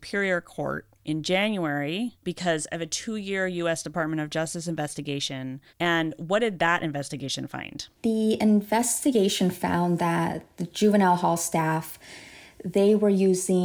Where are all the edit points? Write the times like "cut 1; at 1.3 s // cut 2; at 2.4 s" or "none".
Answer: cut 1; at 1.0 s // cut 2; at 5.7 s // cut 3; at 7.9 s